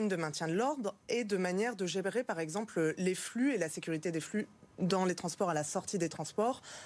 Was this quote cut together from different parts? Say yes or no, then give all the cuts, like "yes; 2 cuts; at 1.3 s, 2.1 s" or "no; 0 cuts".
no; 0 cuts